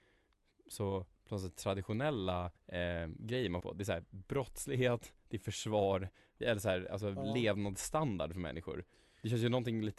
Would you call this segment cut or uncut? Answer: cut